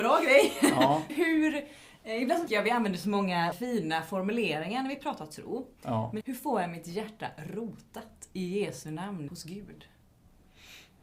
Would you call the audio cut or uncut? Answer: cut